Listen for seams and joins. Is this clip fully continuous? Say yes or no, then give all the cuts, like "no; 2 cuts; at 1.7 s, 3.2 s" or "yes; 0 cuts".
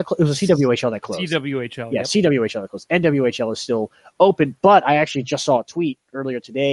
yes; 0 cuts